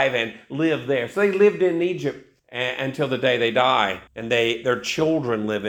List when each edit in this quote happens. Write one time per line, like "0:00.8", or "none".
0:02.4
0:04.1